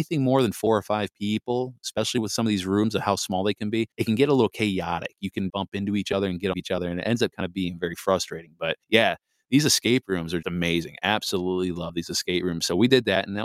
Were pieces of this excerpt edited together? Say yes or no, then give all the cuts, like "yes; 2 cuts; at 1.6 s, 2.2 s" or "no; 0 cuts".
yes; 5 cuts; at 3.9 s, 5.5 s, 6.5 s, 8.8 s, 10.4 s